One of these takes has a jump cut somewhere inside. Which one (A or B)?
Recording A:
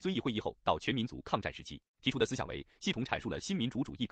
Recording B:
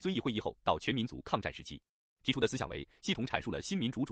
A